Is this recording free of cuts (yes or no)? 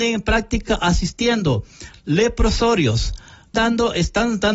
no